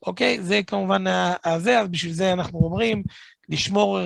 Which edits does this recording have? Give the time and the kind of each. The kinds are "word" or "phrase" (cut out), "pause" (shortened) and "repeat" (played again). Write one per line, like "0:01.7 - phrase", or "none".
none

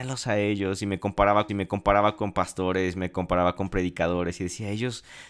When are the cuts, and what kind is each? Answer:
0:01.5 - repeat

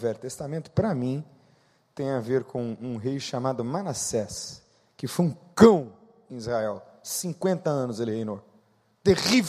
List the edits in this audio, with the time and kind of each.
none

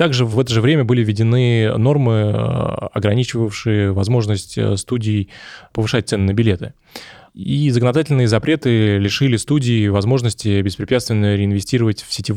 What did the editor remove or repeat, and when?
none

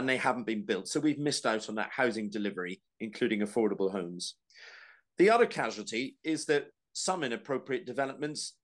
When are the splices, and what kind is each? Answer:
none

